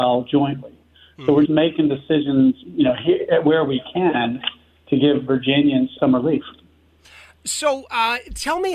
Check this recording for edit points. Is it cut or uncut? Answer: cut